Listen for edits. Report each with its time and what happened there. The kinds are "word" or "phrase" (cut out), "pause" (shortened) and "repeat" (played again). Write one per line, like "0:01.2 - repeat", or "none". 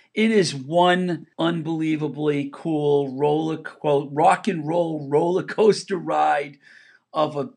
0:01.3 - pause